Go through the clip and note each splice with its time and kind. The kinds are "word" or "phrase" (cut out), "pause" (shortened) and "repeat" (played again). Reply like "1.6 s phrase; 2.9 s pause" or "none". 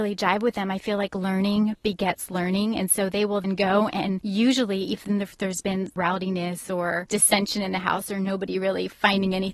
3.4 s word